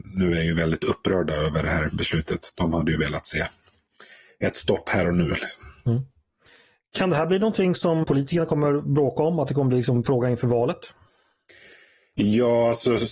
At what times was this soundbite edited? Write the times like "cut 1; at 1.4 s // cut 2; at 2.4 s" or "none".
cut 1; at 8.0 s